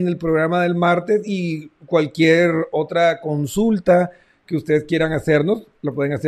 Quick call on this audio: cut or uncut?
uncut